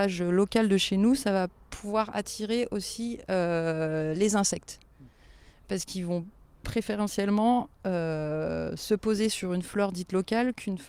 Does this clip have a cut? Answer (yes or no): no